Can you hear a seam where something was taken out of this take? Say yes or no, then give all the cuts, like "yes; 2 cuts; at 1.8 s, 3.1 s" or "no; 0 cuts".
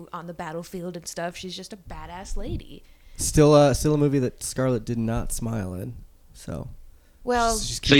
no; 0 cuts